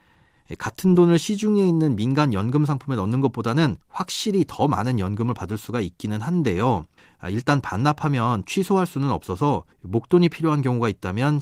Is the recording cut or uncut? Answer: cut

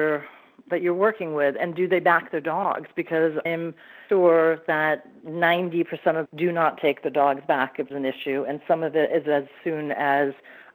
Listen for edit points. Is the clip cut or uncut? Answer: cut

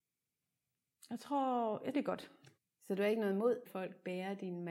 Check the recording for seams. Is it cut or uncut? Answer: cut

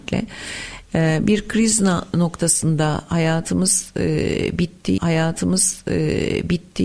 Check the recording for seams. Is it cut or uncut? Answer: cut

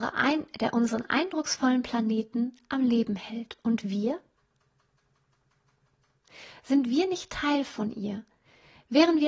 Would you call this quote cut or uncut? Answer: uncut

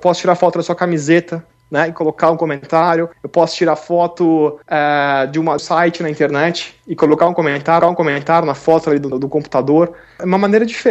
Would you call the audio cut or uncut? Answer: cut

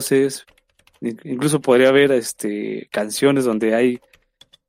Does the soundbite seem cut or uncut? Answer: uncut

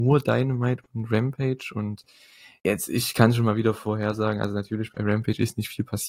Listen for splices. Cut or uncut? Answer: uncut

